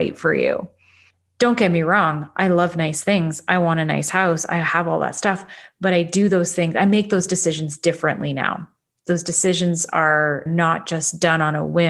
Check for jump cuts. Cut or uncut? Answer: uncut